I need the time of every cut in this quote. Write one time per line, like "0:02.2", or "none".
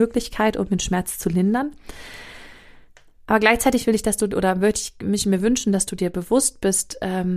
none

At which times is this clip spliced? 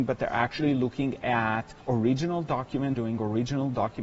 0:01.8
0:03.0

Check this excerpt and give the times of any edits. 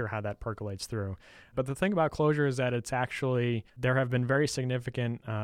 0:03.7

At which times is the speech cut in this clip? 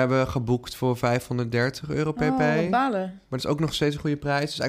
none

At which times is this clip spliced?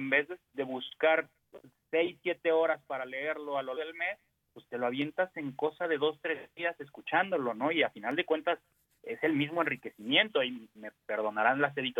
0:03.8

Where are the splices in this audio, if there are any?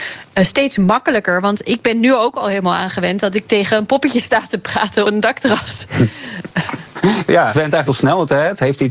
0:05.0
0:07.5
0:07.9

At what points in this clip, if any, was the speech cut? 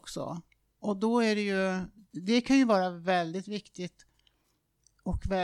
none

